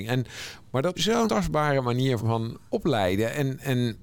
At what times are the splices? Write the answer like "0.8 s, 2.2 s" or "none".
0.9 s, 1.3 s, 2.2 s

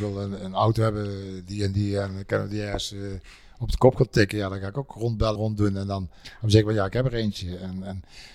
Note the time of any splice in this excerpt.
5.3 s

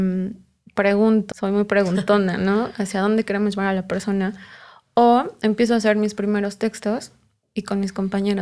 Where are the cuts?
1.3 s

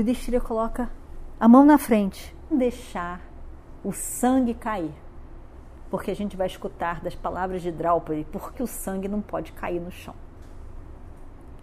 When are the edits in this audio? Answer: 2.5 s, 8.5 s

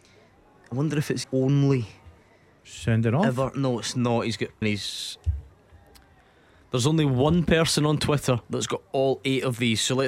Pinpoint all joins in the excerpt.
1.2 s, 4.6 s

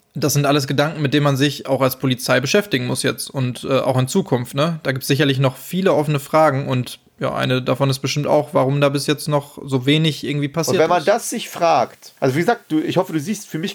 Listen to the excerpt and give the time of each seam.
12.2 s

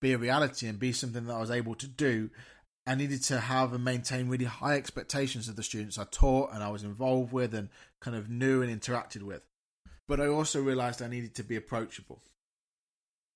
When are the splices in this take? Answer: 2.7 s, 10.0 s

